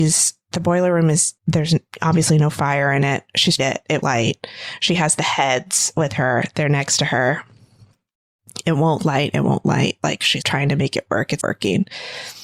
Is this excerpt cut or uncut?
cut